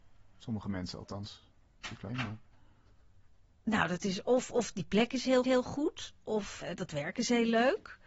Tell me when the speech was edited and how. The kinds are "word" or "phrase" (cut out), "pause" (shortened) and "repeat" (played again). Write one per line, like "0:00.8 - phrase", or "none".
0:02.1 - phrase
0:03.4 - pause
0:05.4 - repeat
0:06.6 - word